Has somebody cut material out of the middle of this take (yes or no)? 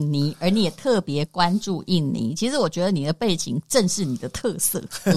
no